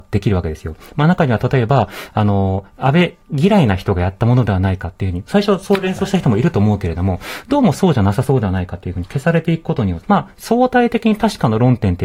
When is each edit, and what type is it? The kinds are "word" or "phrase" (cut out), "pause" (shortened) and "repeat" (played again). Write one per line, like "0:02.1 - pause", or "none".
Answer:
0:03.2 - pause
0:10.0 - phrase